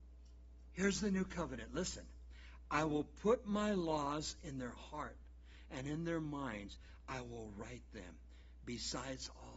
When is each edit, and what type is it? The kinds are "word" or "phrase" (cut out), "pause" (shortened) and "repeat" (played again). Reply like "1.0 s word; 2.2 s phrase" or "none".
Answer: none